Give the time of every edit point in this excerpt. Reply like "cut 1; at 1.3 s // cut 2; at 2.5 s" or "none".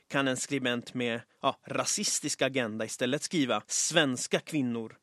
cut 1; at 3.6 s